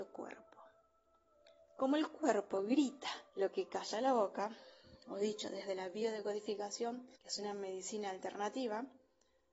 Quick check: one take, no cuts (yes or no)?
no